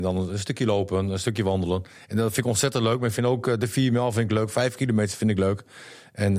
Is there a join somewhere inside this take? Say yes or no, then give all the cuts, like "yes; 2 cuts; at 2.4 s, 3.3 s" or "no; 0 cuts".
no; 0 cuts